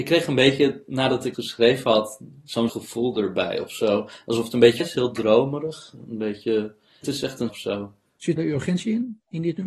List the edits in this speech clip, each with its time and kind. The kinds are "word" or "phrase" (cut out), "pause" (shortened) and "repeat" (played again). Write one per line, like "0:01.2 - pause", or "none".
0:01.3 - word
0:02.7 - word
0:04.8 - word
0:07.0 - word
0:07.5 - word
0:08.4 - word